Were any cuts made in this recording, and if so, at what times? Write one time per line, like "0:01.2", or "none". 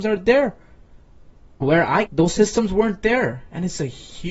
0:01.6
0:02.1